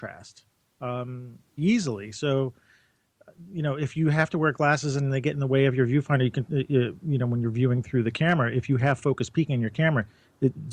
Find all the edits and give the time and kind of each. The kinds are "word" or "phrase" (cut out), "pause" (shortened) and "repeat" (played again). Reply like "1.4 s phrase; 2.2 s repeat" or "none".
1.6 s word